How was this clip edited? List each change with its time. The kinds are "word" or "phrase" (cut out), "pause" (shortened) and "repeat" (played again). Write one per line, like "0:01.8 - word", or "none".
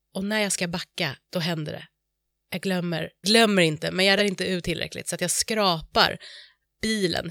0:01.2 - pause
0:03.2 - word
0:04.2 - word
0:04.6 - word